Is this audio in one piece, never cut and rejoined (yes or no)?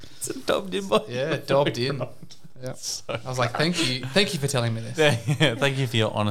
yes